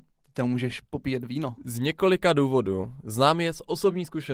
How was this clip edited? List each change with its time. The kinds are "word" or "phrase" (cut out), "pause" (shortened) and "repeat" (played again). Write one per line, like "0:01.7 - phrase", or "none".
none